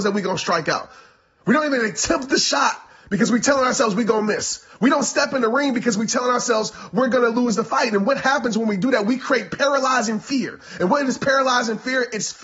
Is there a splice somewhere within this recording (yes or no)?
no